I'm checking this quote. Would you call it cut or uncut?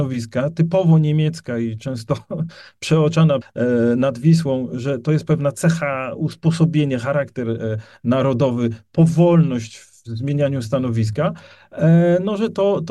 cut